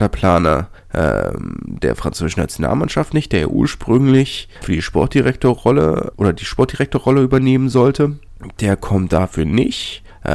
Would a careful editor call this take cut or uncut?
cut